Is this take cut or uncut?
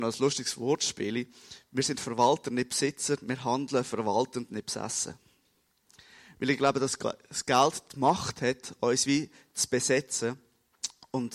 uncut